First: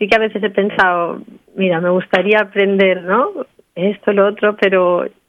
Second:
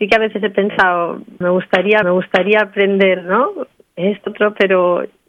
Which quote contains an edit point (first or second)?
second